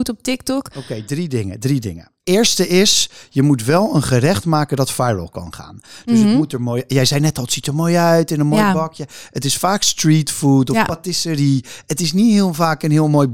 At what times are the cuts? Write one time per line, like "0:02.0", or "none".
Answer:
0:02.2